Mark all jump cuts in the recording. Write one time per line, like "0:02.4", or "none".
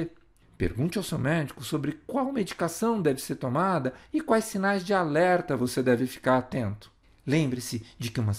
0:07.0